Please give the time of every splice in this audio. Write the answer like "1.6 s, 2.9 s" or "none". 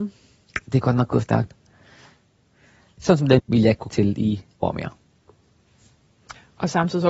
3.4 s, 3.9 s, 4.6 s